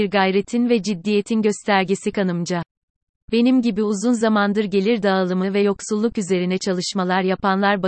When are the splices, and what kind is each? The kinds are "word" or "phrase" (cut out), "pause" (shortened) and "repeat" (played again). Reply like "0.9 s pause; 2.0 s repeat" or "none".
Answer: none